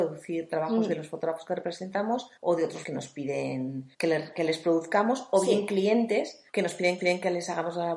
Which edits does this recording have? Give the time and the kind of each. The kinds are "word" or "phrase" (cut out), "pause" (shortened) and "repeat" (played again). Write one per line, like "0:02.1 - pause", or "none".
0:02.4 - pause
0:02.8 - word
0:03.9 - pause
0:06.5 - pause
0:07.0 - repeat

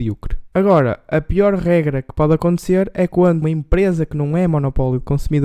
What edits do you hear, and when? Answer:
0:03.4 - word

